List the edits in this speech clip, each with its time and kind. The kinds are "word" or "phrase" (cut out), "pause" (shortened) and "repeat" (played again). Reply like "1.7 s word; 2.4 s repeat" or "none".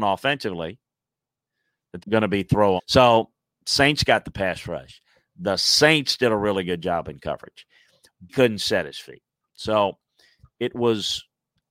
2.0 s word; 2.8 s word; 8.3 s word